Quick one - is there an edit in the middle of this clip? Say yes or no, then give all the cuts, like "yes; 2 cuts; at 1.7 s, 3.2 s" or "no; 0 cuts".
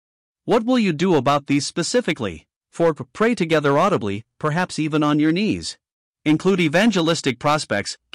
yes; 2 cuts; at 2.6 s, 6.0 s